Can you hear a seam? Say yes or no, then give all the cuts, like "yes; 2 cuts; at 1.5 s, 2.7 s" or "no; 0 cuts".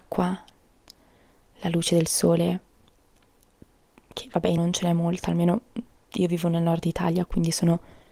yes; 1 cut; at 4.6 s